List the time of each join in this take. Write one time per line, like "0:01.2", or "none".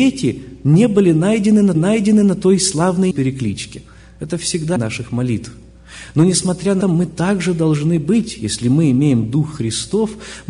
0:01.7
0:03.1
0:04.8
0:06.8